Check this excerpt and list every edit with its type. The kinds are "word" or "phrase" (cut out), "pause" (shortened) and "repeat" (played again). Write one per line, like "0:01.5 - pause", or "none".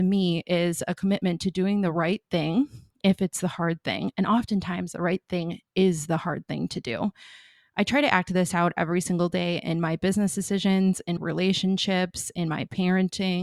0:03.0 - word
0:11.2 - word